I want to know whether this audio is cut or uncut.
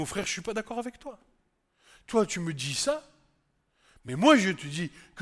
uncut